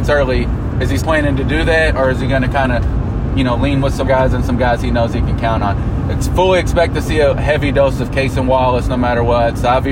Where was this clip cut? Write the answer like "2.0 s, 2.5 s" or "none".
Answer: 1.0 s, 4.0 s